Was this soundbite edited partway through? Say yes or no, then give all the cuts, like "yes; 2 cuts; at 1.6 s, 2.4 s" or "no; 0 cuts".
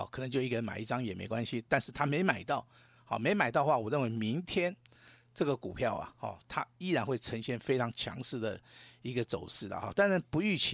no; 0 cuts